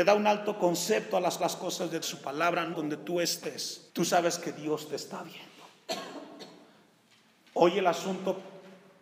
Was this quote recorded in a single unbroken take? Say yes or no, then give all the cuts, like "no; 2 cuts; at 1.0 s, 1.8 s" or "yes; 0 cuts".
no; 4 cuts; at 1.4 s, 2.0 s, 2.7 s, 3.9 s